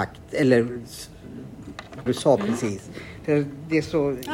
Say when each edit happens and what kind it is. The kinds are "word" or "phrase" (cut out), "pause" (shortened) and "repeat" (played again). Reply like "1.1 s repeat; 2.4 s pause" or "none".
2.1 s word